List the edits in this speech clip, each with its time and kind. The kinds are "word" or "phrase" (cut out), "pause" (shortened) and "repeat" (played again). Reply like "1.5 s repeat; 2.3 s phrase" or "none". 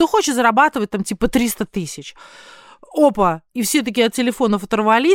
none